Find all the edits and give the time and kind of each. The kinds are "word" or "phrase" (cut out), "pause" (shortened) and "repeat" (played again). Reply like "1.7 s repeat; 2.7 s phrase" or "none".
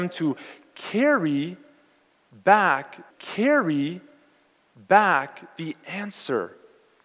3.1 s repeat